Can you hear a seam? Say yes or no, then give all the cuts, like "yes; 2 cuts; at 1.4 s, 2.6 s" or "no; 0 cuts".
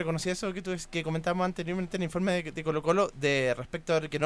no; 0 cuts